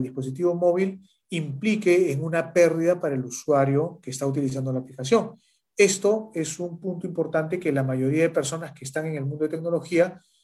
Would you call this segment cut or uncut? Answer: uncut